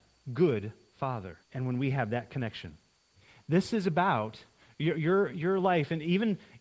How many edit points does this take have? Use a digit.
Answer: 1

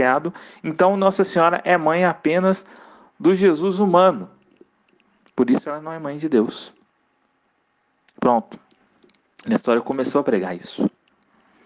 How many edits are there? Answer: 0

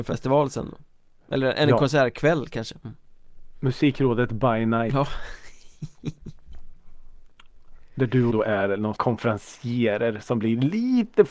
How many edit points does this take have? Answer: 3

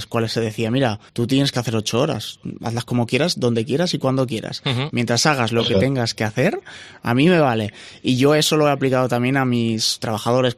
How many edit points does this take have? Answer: 1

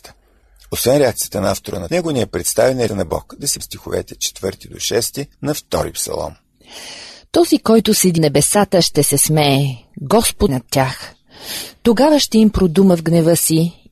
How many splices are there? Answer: 6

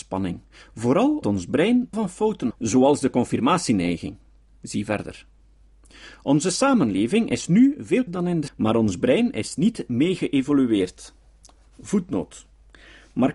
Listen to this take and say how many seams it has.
5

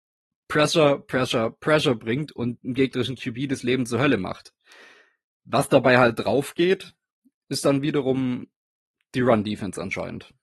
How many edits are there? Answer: 0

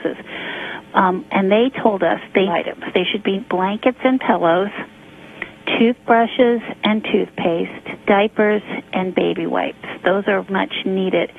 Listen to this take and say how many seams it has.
4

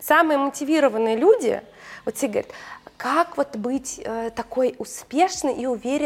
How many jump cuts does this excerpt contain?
0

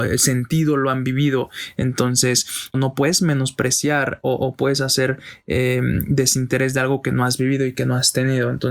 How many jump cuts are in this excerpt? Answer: 1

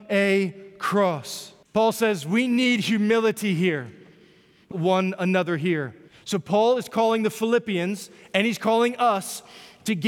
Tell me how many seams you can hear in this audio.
3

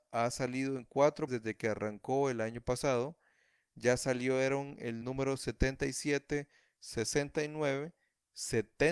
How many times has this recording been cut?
2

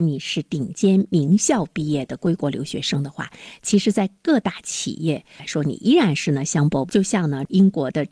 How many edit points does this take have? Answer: 1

